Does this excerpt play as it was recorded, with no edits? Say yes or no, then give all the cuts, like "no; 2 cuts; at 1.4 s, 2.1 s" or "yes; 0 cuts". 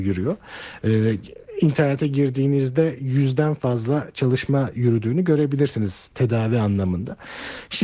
yes; 0 cuts